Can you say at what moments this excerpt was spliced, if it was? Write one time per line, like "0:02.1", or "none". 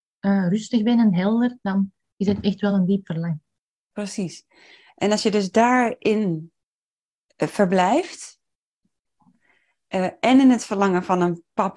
none